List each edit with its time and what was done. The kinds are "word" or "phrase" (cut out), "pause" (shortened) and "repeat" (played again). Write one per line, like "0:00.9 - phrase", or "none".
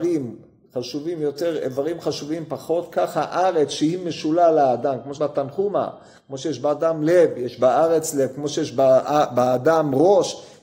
0:05.2 - word